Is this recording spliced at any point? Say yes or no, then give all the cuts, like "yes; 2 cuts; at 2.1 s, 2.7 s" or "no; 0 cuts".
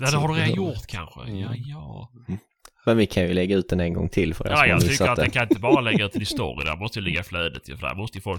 no; 0 cuts